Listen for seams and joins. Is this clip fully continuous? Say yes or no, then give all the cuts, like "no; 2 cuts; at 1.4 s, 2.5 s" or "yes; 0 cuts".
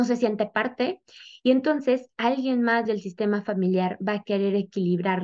yes; 0 cuts